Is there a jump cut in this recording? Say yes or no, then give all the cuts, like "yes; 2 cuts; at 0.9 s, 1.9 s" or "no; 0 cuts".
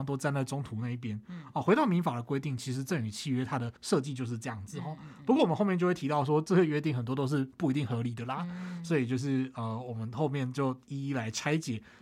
yes; 1 cut; at 3.8 s